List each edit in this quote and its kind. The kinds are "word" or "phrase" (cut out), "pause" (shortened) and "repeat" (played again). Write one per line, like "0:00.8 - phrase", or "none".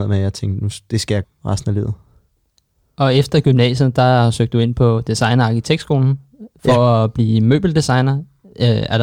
0:01.2 - word